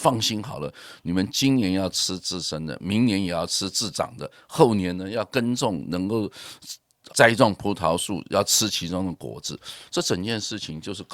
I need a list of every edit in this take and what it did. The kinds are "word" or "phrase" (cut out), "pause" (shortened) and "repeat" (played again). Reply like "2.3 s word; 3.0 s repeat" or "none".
7.1 s word